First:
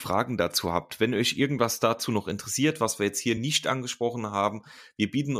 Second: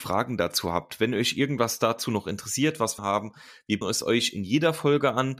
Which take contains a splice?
second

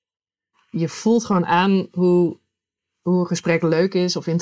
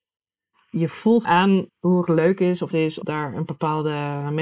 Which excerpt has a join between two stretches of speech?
second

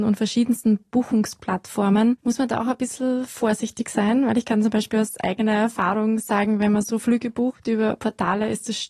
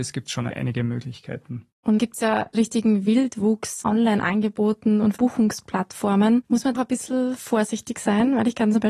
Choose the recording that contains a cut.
second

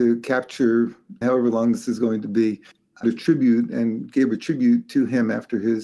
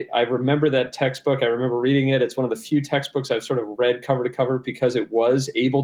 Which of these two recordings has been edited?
first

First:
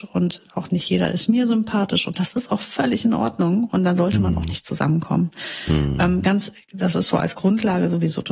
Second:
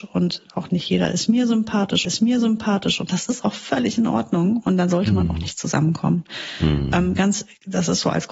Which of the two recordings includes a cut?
second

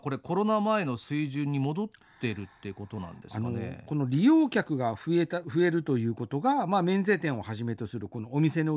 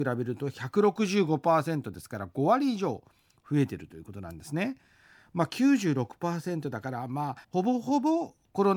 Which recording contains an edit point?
second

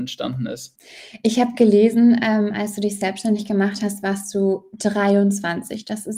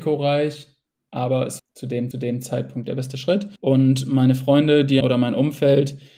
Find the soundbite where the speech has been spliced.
second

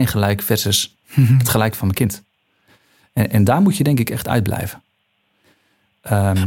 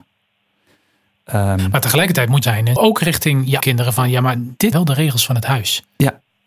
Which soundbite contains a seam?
second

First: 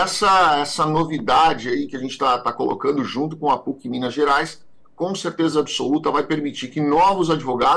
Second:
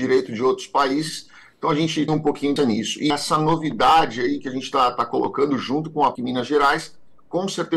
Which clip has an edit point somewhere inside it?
second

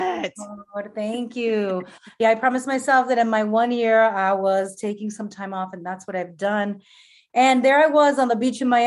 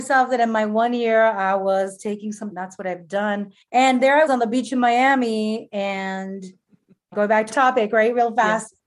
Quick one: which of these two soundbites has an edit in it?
second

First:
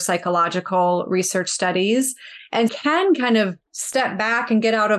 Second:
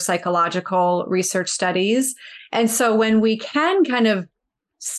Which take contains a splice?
first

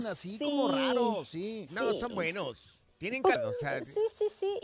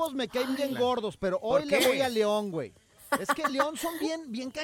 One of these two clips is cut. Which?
first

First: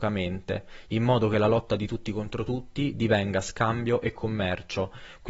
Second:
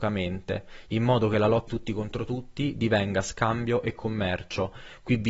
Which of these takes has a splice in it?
second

